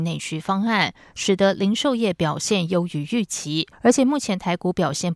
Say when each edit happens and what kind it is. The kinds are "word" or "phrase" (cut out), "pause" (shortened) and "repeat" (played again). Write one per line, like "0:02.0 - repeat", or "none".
0:03.7 - pause